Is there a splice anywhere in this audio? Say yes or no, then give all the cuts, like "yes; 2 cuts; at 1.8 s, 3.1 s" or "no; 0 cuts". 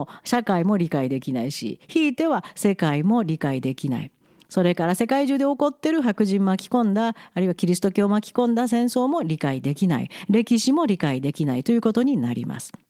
no; 0 cuts